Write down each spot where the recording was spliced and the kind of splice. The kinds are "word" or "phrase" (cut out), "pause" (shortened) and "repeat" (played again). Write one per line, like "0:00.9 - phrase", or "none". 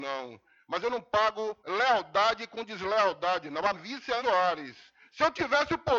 0:01.6 - pause
0:03.7 - word
0:04.2 - phrase